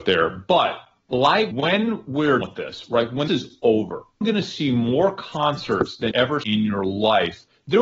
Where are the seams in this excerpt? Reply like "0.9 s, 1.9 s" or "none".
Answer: 1.5 s, 2.4 s, 3.3 s, 4.2 s, 6.1 s, 6.4 s